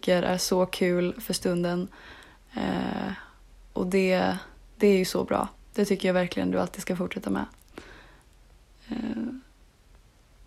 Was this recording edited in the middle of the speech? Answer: no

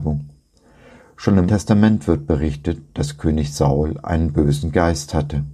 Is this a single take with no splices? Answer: no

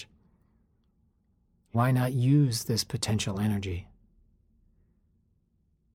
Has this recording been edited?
no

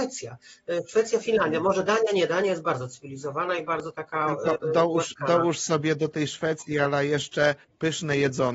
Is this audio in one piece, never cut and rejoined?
yes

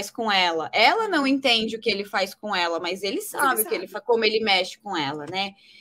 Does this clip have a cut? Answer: no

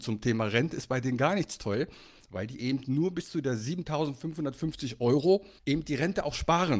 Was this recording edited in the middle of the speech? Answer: yes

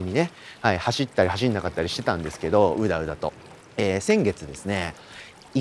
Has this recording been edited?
yes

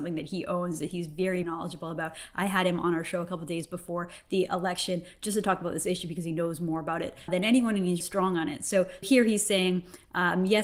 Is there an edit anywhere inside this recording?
yes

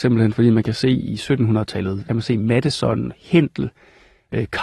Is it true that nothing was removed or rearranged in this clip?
no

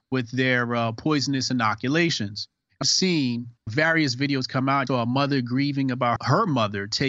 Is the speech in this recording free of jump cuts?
no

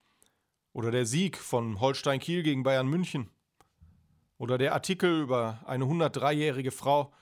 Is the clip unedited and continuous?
yes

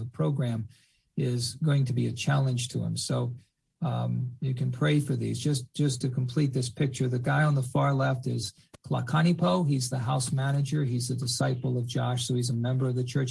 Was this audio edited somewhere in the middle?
no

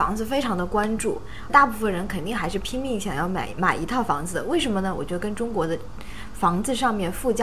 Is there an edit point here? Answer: yes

